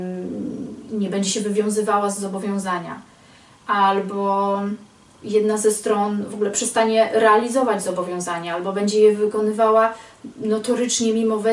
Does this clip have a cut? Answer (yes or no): no